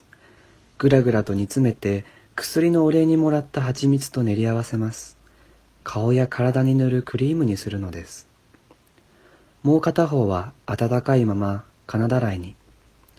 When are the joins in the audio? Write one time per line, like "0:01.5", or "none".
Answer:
none

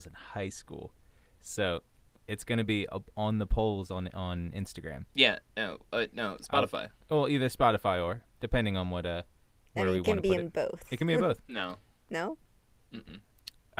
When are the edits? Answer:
none

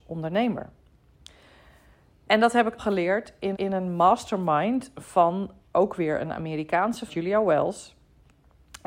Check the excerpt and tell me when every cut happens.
0:02.8
0:03.5
0:05.6
0:07.1

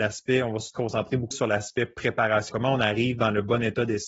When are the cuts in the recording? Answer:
0:01.3
0:02.5

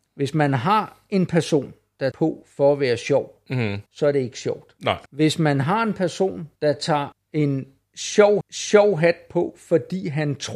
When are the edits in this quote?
0:02.1
0:03.9
0:05.1
0:06.6
0:07.1
0:08.4

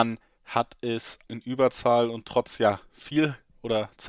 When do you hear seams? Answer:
0:01.3

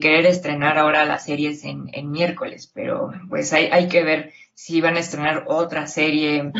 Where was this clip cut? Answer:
none

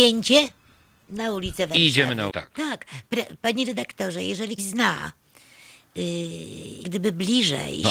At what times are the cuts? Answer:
0:02.3
0:04.6
0:06.8

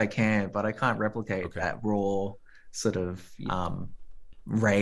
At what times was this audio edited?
0:03.5

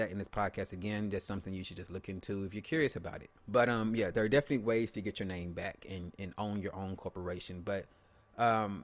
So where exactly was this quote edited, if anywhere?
0:03.4

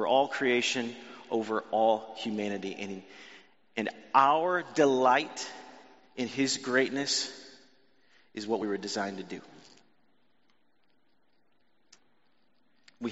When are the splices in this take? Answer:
none

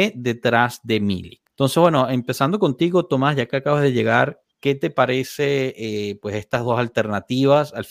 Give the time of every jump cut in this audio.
0:01.5

